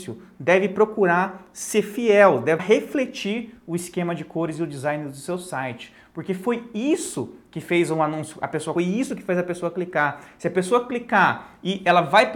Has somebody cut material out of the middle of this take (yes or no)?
yes